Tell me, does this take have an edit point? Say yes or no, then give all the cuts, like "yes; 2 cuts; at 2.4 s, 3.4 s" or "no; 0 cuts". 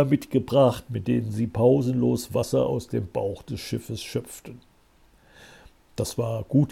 no; 0 cuts